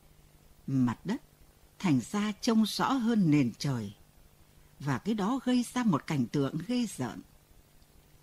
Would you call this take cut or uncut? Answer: uncut